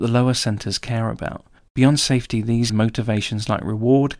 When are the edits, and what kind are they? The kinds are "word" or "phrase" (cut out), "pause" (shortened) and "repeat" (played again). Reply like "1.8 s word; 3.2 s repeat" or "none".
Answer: 1.6 s pause; 2.7 s word